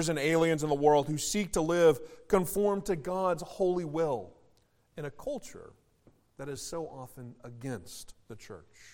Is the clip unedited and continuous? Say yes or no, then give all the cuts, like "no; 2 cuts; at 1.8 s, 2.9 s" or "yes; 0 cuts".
yes; 0 cuts